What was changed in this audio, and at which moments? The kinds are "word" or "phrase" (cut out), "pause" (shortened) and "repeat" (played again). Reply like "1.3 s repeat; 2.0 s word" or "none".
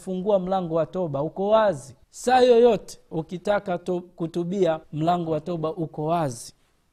2.0 s pause; 4.8 s pause